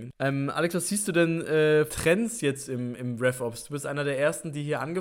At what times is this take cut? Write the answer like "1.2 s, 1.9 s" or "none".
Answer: 1.9 s